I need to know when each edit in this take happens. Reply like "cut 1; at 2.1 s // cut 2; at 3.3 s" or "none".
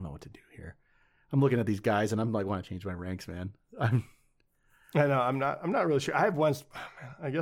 none